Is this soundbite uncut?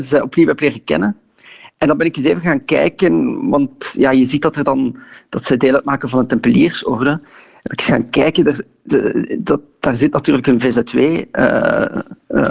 yes; 0 cuts

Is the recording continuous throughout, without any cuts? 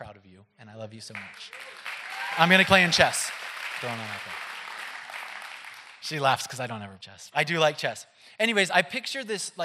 no; 5 cuts; at 2.3 s, 2.7 s, 3.8 s, 7.0 s, 7.3 s

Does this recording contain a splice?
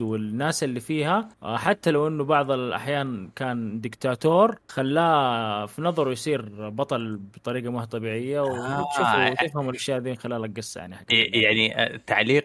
yes; 2 cuts; at 1.3 s, 4.6 s

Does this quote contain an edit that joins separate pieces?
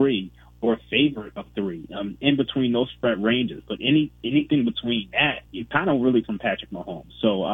yes; 2 cuts; at 5.5 s, 6.2 s

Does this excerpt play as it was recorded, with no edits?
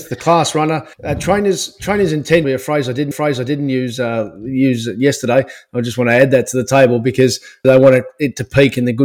no; 4 cuts; at 0.9 s, 2.4 s, 3.1 s, 7.6 s

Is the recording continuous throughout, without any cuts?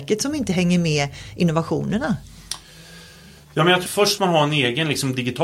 no; 2 cuts; at 3.9 s, 4.2 s

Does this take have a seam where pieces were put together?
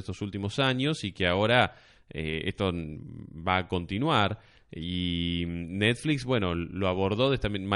no; 0 cuts

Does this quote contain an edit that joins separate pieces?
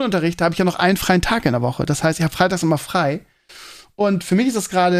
no; 0 cuts

